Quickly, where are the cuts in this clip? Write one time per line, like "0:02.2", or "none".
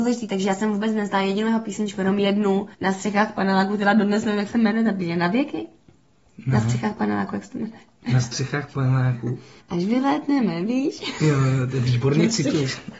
0:02.7
0:09.6